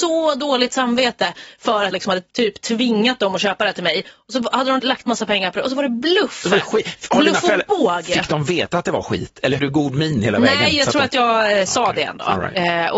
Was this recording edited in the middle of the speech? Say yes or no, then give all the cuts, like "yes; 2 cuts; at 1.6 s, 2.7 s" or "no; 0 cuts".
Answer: yes; 3 cuts; at 1.9 s, 4.8 s, 9.6 s